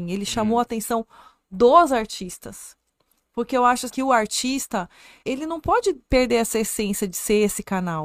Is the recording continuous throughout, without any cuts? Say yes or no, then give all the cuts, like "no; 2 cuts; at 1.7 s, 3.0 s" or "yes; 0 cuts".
no; 2 cuts; at 3.9 s, 5.2 s